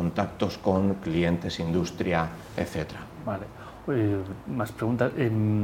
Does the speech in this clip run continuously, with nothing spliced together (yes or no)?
yes